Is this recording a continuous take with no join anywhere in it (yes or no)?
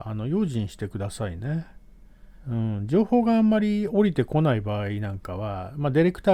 no